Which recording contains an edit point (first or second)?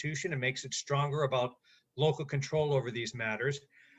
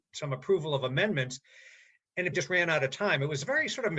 second